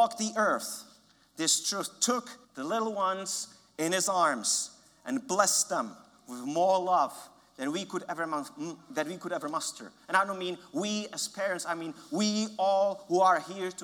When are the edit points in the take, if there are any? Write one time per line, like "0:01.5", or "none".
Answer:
0:02.4